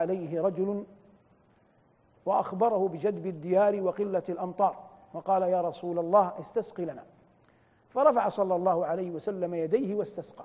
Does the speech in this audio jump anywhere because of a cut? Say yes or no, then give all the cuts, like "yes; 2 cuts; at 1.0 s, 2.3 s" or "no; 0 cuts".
no; 0 cuts